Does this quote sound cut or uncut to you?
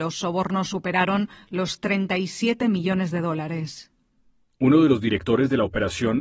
uncut